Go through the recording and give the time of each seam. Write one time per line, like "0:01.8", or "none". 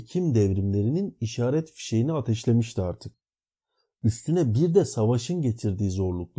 none